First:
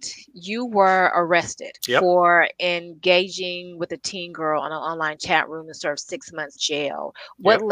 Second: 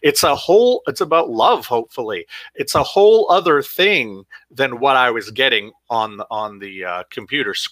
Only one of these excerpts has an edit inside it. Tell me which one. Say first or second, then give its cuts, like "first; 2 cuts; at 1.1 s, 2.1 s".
first; 2 cuts; at 1.8 s, 6.6 s